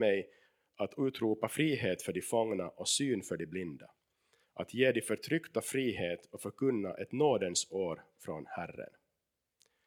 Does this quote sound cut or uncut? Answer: uncut